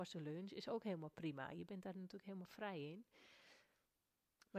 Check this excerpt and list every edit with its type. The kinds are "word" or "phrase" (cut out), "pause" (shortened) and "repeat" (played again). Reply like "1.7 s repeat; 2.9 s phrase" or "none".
none